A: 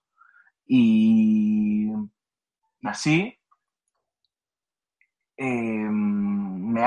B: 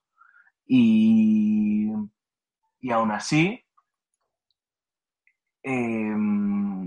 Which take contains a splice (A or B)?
A